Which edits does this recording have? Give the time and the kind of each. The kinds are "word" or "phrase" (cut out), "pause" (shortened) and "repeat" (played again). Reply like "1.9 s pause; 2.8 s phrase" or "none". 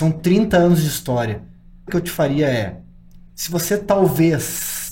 1.9 s word